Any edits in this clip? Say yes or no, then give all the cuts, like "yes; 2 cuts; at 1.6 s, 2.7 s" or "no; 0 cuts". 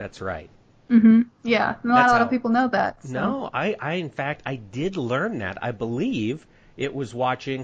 no; 0 cuts